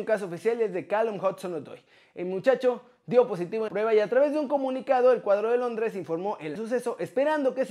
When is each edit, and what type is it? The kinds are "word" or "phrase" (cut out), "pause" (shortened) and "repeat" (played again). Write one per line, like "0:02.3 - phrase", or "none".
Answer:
0:03.7 - word
0:06.6 - word

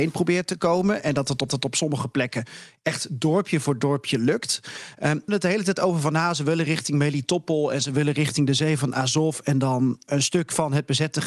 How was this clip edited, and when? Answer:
0:01.5 - repeat
0:05.3 - word
0:10.1 - word

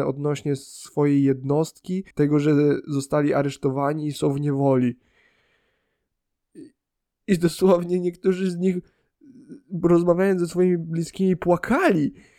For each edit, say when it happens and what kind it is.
0:02.1 - pause

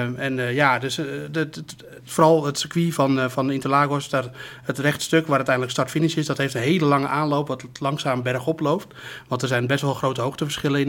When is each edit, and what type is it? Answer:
none

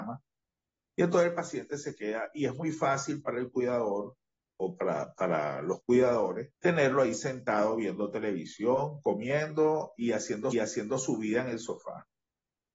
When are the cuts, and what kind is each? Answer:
0:06.5 - pause
0:10.5 - repeat

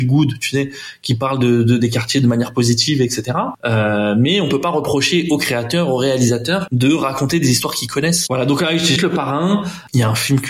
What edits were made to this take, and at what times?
0:09.0 - word

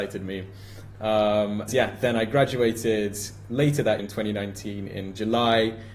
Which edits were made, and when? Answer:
0:01.7 - word
0:04.0 - word

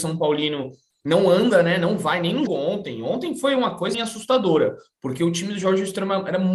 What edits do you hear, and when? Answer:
0:02.5 - word
0:03.9 - word

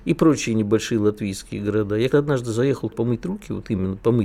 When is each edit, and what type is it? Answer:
0:02.1 - word
0:02.9 - word

